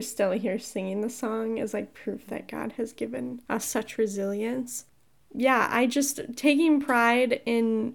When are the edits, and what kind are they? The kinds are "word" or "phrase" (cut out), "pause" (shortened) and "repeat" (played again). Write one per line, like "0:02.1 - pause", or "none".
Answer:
0:03.4 - pause